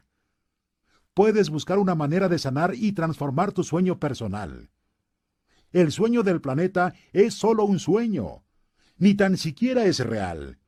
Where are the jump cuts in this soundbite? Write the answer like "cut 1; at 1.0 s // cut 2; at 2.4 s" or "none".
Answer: none